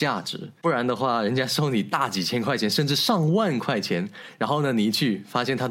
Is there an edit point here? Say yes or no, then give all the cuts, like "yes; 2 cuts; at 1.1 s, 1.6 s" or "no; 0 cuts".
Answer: no; 0 cuts